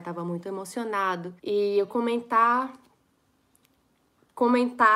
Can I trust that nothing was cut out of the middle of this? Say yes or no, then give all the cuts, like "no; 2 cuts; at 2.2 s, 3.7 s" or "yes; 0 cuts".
no; 2 cuts; at 1.4 s, 1.9 s